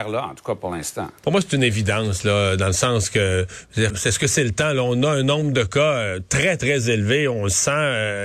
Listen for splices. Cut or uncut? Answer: cut